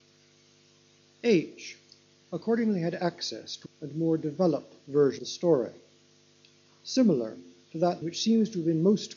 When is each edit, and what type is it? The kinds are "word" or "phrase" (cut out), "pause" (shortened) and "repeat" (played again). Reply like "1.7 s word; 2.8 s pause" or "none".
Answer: 3.7 s word; 5.2 s word; 8.0 s word